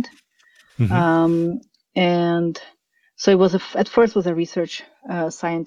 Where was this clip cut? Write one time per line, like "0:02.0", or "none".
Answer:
none

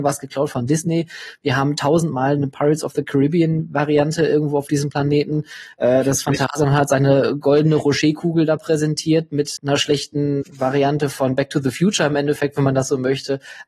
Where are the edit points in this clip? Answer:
0:09.6
0:10.4

